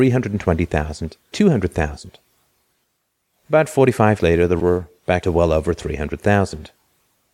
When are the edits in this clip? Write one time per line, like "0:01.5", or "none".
0:01.3
0:04.2
0:04.6
0:05.2